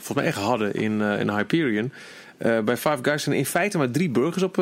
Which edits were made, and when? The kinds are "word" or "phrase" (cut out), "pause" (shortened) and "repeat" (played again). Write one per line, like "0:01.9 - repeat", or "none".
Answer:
none